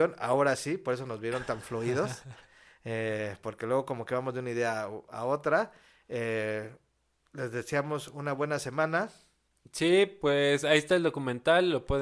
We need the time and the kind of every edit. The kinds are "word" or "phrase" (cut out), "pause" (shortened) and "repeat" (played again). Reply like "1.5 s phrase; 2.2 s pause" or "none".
none